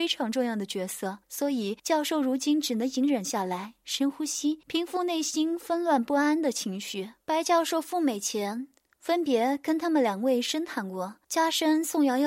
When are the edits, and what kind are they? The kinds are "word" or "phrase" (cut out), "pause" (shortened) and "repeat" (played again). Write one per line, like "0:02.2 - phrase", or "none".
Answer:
0:01.2 - pause
0:01.8 - pause
0:04.6 - pause
0:07.2 - pause
0:11.2 - pause